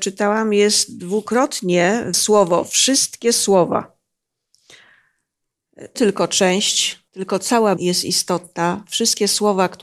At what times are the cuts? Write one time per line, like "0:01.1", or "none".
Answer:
0:02.1
0:06.0
0:07.1
0:07.8